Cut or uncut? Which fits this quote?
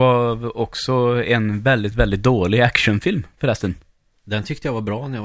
uncut